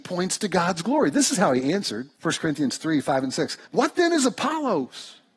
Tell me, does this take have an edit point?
yes; 2 cuts; at 2.1 s, 3.6 s

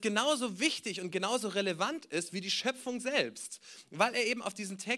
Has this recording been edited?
no; 0 cuts

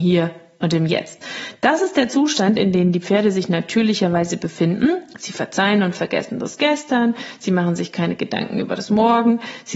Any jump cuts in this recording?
no; 0 cuts

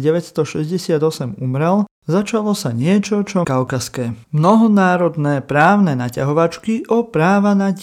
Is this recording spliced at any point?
yes; 2 cuts; at 3.4 s, 4.2 s

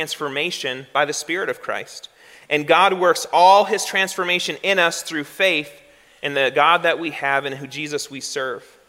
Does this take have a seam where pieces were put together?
no; 0 cuts

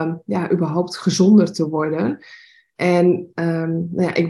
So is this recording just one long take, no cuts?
yes; 0 cuts

